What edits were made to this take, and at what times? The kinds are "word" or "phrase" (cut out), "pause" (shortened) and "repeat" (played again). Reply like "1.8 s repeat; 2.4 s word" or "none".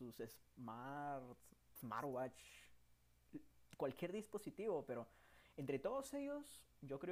1.8 s word